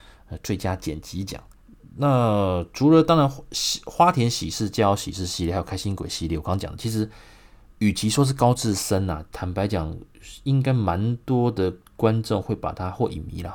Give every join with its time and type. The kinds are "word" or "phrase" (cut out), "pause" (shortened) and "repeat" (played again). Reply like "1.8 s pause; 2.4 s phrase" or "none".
11.9 s pause